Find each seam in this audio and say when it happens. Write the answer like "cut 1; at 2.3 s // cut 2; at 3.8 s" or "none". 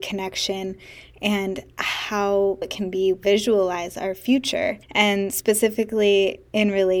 cut 1; at 2.6 s // cut 2; at 3.1 s // cut 3; at 4.8 s